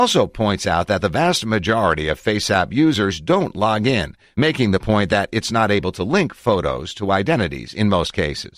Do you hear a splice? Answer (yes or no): no